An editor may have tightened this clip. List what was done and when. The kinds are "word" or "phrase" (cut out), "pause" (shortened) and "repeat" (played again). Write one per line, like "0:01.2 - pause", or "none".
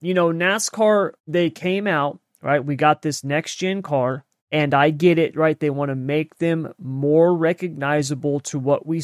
0:01.2 - pause
0:04.4 - pause

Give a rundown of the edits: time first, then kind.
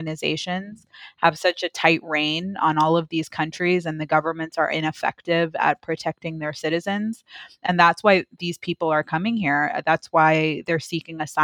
none

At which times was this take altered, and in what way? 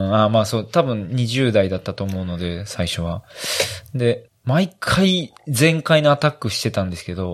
0:04.3 - phrase

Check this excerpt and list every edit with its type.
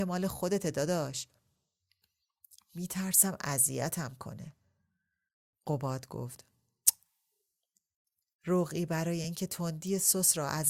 none

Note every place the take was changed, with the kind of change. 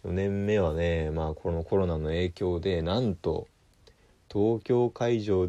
none

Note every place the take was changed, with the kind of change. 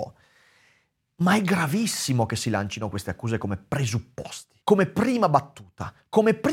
0:04.6 - pause

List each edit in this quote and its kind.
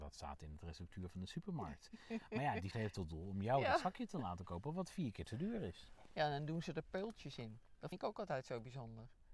0:02.7 - word
0:07.9 - word

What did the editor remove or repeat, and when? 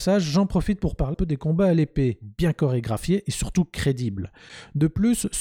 0:01.1 - word

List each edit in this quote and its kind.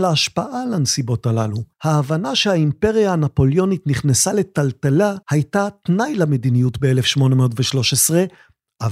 0:01.7 - pause
0:05.2 - pause

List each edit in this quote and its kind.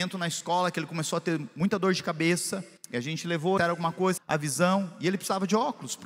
0:02.8 - pause
0:03.6 - phrase
0:04.2 - word

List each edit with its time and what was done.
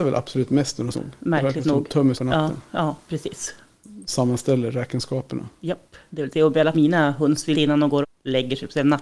0:00.9 - phrase
0:02.1 - word
0:06.0 - pause
0:06.7 - word
0:07.5 - phrase
0:08.0 - word

